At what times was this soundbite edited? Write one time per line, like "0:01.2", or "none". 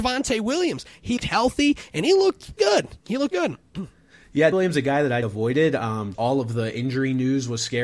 0:01.2
0:02.6
0:03.3
0:04.5
0:05.2
0:06.1